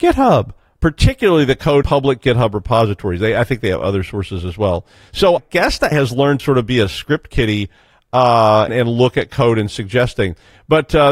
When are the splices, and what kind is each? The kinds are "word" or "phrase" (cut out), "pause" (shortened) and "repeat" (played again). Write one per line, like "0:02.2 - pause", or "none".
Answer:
0:01.8 - word
0:05.4 - word
0:05.9 - word
0:06.4 - word
0:08.7 - word